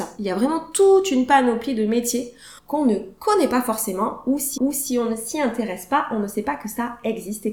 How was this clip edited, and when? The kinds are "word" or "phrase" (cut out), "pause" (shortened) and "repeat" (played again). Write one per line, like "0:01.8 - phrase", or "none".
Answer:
0:02.6 - pause
0:04.6 - repeat